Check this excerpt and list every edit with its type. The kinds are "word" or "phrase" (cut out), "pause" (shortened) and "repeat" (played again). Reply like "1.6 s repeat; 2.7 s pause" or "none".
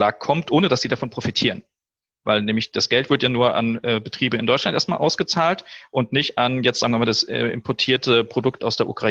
none